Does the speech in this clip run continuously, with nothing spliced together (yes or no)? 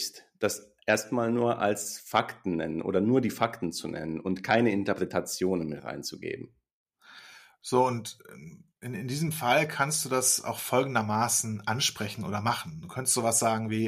yes